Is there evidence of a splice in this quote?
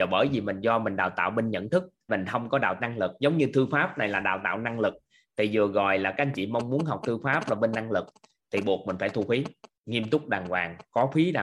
yes; 2 cuts; at 2.1 s, 2.8 s

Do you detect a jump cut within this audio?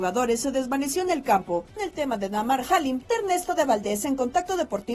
yes; 2 cuts; at 1.8 s, 3.1 s

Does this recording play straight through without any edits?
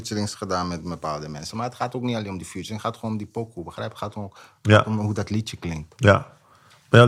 yes; 0 cuts

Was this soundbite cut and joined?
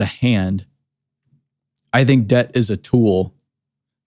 no; 0 cuts

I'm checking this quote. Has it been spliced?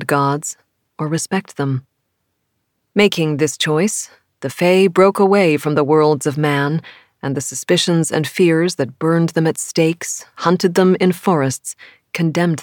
no; 0 cuts

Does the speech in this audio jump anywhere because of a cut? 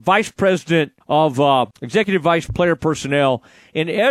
yes; 3 cuts; at 1.0 s, 1.7 s, 2.5 s

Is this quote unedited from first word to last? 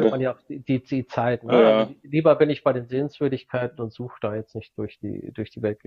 yes; 0 cuts

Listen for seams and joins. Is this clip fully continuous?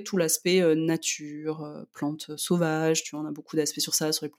yes; 0 cuts

